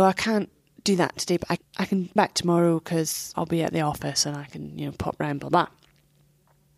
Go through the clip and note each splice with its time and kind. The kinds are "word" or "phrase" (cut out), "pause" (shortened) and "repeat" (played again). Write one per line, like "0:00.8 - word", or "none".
0:01.6 - word
0:02.2 - word
0:03.3 - word